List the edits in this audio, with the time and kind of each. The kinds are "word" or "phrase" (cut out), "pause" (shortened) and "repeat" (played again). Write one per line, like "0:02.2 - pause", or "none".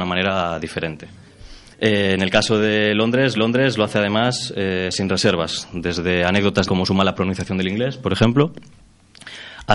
0:01.7 - pause
0:03.4 - repeat
0:06.7 - word